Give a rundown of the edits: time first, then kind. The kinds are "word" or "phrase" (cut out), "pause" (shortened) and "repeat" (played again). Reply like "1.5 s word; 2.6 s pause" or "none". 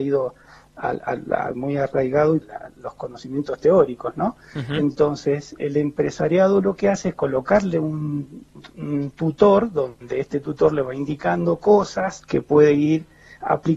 1.5 s word; 2.4 s phrase; 5.6 s word; 12.3 s pause